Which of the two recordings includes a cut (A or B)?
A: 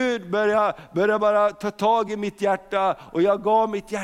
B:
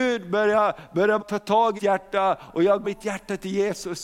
B